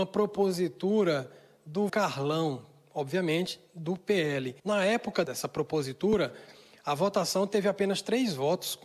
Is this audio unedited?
no; 3 cuts; at 1.9 s, 4.6 s, 5.2 s

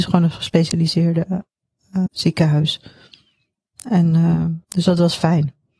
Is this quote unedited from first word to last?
no; 2 cuts; at 2.1 s, 4.6 s

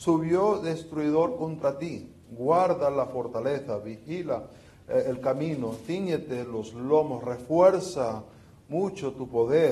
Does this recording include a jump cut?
no; 0 cuts

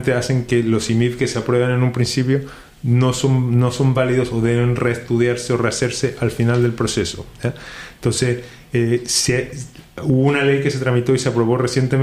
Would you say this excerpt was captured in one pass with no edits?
yes; 0 cuts

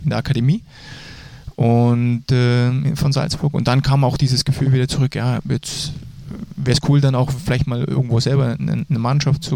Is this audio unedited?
yes; 0 cuts

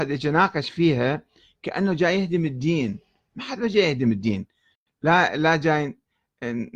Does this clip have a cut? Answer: no; 0 cuts

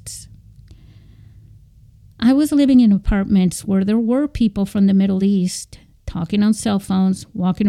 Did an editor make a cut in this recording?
no; 0 cuts

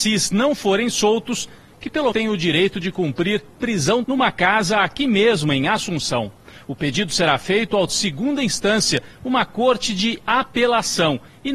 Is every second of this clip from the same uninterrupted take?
no; 3 cuts; at 2.1 s, 4.0 s, 7.9 s

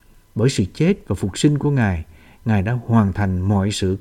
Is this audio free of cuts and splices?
yes; 0 cuts

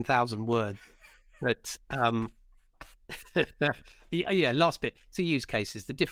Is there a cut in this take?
no; 0 cuts

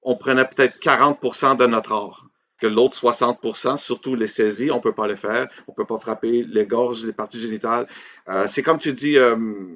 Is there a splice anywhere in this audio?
yes; 1 cut; at 2.6 s

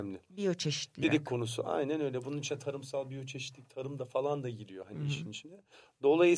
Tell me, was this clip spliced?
yes; 1 cut; at 1.0 s

